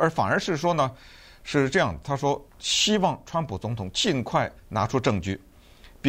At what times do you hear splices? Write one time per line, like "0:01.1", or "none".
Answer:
0:02.5
0:04.6